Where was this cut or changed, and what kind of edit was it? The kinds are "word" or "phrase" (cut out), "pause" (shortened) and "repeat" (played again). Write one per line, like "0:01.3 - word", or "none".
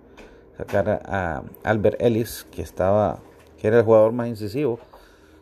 none